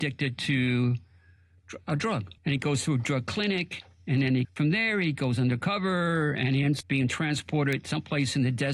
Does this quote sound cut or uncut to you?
cut